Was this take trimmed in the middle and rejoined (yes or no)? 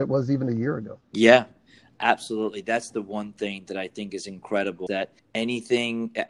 yes